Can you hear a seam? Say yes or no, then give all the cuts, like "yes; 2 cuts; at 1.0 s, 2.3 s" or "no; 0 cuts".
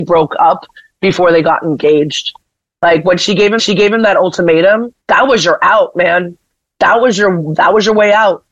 yes; 2 cuts; at 3.6 s, 5.0 s